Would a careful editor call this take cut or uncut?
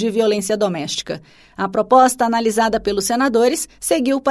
uncut